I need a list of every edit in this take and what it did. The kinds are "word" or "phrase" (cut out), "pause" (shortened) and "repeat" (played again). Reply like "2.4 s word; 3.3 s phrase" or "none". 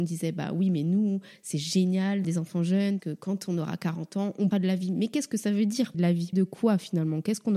2.2 s word; 3.0 s word; 4.5 s word; 5.9 s word; 6.3 s word